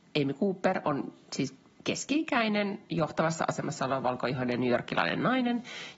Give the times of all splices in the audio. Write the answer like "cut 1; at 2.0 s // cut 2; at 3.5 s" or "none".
cut 1; at 1.7 s